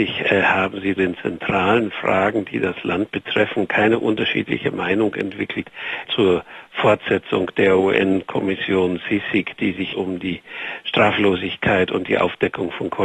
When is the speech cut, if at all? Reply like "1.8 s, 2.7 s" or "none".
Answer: 1.0 s, 6.0 s, 9.9 s